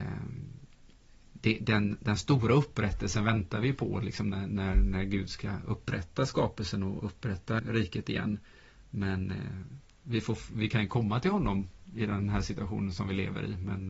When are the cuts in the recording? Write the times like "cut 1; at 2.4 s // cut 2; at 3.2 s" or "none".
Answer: cut 1; at 7.6 s